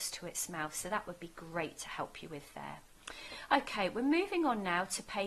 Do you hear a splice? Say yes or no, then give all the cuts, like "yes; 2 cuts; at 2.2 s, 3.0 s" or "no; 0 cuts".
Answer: no; 0 cuts